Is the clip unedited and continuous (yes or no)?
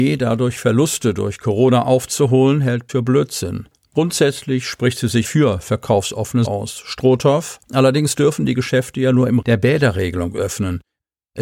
no